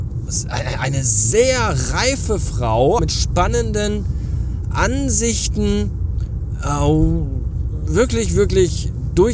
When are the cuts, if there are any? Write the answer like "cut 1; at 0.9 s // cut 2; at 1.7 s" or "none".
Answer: cut 1; at 3.0 s